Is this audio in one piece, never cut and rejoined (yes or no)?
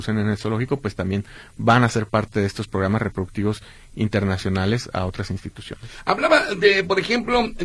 yes